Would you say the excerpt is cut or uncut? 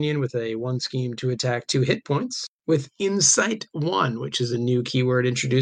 uncut